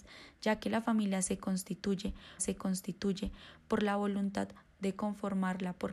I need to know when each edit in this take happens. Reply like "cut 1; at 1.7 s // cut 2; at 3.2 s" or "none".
cut 1; at 2.4 s